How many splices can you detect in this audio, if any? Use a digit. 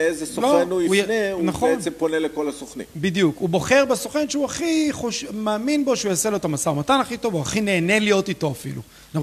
0